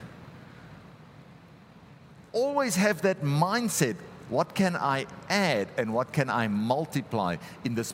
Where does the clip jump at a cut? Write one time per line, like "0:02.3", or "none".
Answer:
0:02.3